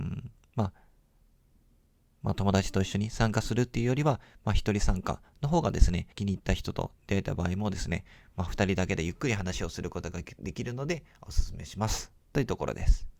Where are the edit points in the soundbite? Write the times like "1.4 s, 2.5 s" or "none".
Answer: 6.1 s